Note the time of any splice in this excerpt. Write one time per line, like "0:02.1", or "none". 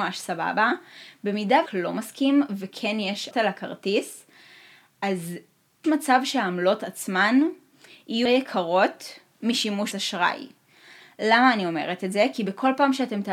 0:01.7
0:03.3
0:05.8
0:08.3
0:09.9